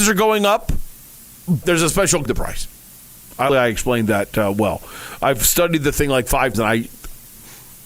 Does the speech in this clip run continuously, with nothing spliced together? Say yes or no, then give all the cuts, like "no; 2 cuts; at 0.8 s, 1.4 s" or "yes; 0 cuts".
no; 4 cuts; at 1.6 s, 2.3 s, 3.5 s, 6.5 s